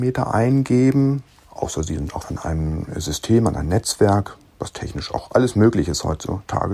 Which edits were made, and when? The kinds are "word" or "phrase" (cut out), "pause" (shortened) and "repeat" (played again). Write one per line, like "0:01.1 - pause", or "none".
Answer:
0:02.2 - phrase